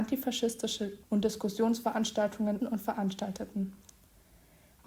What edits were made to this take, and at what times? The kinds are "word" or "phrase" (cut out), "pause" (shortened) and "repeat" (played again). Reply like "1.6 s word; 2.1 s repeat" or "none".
1.0 s word; 2.6 s word